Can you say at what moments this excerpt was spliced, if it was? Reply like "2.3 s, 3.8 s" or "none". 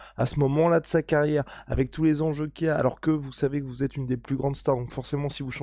none